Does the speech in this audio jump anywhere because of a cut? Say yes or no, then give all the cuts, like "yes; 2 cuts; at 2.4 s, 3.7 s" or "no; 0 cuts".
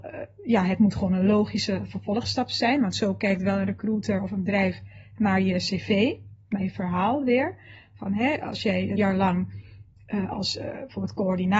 yes; 1 cut; at 9.0 s